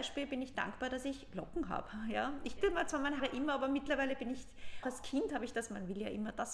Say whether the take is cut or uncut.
cut